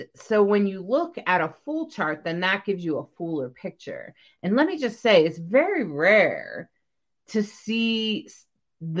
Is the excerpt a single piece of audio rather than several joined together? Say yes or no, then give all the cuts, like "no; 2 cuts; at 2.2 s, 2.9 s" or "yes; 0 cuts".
yes; 0 cuts